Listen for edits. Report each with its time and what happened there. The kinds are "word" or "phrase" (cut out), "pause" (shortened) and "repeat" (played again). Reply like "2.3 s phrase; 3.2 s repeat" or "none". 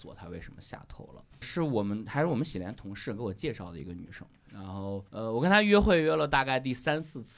1.4 s word; 5.1 s pause